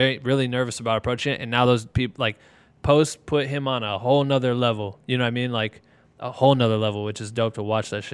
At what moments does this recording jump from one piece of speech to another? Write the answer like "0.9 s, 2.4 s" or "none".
none